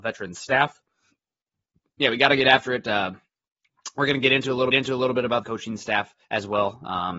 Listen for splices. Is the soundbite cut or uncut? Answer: cut